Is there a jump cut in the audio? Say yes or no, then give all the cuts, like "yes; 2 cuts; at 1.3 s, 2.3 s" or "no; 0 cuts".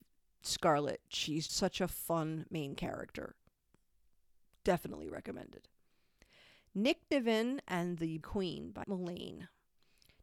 yes; 3 cuts; at 1.5 s, 8.2 s, 8.8 s